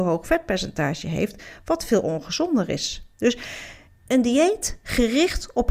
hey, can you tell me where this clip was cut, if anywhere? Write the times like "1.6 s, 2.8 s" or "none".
3.1 s